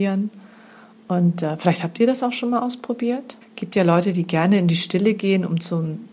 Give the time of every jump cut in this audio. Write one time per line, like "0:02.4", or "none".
0:03.4